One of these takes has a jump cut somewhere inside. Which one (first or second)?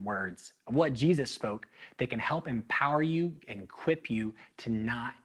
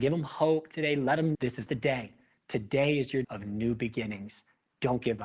second